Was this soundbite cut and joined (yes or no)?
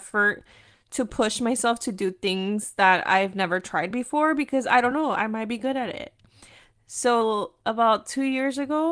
no